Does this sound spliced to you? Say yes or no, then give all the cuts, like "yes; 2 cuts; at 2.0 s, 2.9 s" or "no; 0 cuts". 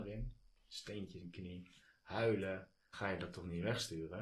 yes; 2 cuts; at 1.2 s, 2.9 s